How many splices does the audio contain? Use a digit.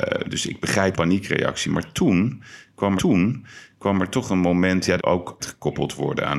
4